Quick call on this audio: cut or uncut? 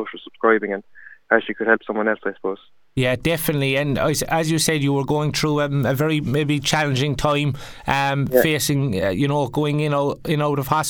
uncut